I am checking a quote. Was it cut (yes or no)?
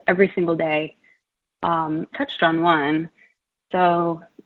yes